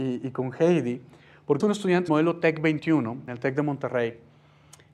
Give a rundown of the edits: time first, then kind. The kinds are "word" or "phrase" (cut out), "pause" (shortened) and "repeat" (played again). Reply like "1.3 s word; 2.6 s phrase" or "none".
1.6 s word; 2.1 s word; 3.3 s word